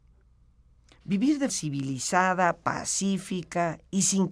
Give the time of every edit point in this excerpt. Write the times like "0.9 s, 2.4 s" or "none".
1.5 s